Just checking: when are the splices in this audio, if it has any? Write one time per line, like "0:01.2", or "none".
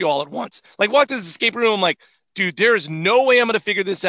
none